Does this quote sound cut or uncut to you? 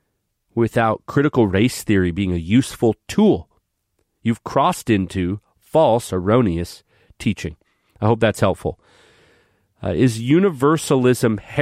uncut